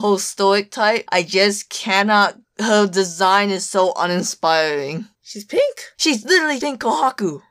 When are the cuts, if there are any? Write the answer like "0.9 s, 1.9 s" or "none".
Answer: 5.9 s, 6.6 s